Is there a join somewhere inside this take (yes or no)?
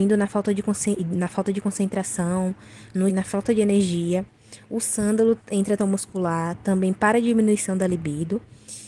yes